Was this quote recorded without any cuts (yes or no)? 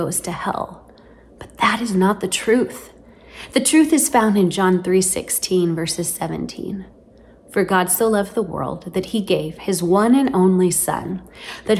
yes